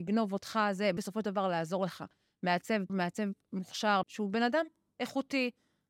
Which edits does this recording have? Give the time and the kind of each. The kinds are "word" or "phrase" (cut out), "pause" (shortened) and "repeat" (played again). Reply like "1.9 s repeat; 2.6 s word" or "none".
1.0 s word; 2.9 s word; 4.0 s word